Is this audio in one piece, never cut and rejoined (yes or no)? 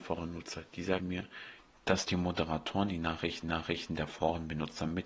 no